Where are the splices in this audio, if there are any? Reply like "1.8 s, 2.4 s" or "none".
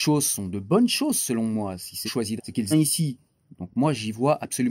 2.1 s, 2.4 s, 2.7 s